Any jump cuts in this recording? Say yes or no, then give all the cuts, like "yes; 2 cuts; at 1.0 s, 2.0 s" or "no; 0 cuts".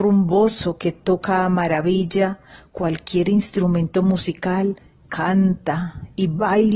yes; 1 cut; at 5.0 s